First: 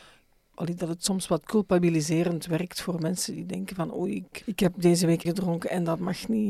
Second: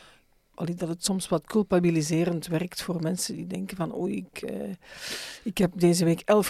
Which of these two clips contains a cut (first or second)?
first